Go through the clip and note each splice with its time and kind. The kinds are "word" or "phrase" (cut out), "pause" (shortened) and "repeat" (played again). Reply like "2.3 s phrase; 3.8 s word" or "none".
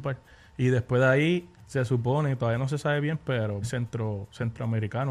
3.6 s word